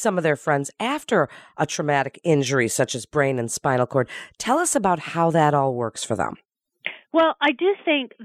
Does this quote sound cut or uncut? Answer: uncut